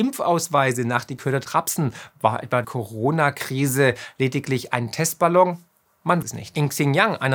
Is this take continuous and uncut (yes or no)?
no